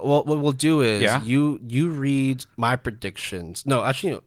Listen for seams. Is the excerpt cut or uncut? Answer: cut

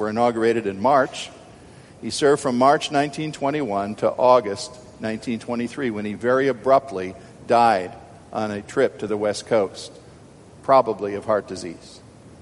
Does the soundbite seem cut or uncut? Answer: uncut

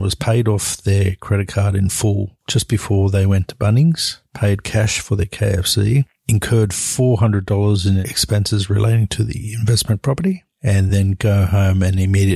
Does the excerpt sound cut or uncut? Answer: uncut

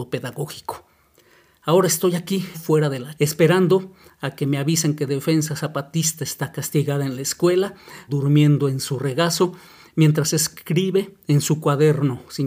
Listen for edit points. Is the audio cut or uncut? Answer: cut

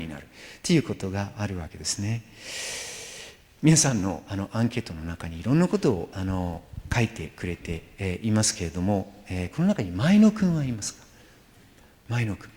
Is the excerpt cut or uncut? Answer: uncut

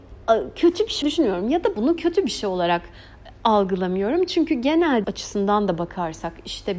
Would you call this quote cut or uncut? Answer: cut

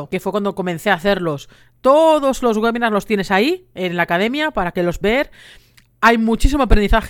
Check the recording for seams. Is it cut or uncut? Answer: cut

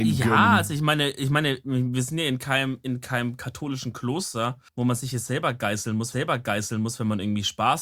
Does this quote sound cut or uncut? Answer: cut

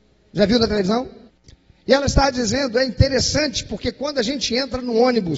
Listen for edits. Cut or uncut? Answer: uncut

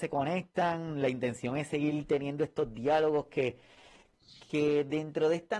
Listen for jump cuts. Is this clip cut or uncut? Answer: uncut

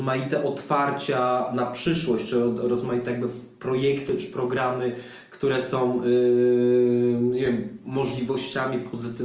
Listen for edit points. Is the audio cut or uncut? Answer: uncut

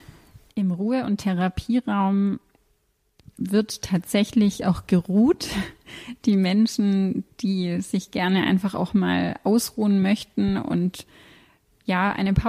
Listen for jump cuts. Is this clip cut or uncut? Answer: uncut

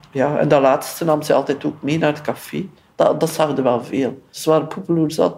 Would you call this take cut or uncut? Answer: uncut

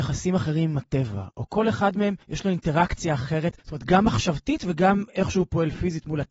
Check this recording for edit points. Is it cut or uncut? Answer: cut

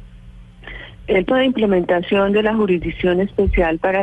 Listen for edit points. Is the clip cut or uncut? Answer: cut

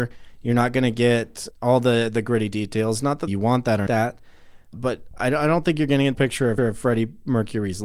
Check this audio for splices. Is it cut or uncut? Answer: cut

